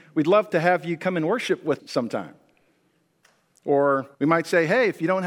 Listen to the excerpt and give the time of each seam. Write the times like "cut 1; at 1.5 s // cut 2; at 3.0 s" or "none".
cut 1; at 1.8 s // cut 2; at 4.1 s